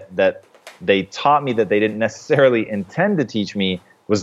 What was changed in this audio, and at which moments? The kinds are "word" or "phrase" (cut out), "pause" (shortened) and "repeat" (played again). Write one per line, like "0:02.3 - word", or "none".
none